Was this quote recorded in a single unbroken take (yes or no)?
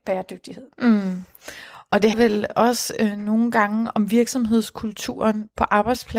no